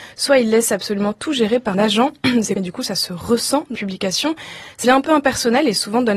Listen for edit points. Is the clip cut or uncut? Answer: cut